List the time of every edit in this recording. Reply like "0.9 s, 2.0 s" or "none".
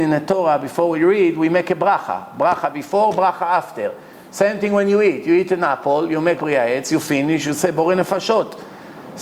6.3 s